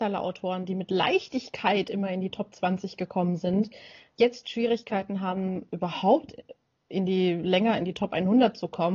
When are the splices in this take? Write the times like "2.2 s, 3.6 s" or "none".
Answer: none